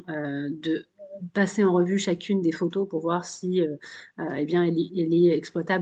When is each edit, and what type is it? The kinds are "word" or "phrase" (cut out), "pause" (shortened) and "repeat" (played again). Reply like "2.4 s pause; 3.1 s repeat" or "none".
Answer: none